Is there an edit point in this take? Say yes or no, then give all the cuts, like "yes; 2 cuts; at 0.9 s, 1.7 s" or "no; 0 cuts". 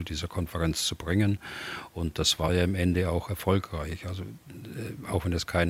no; 0 cuts